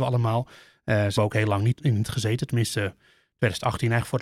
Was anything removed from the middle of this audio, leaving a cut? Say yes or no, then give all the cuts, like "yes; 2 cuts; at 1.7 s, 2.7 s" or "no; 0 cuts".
yes; 3 cuts; at 1.2 s, 1.7 s, 2.0 s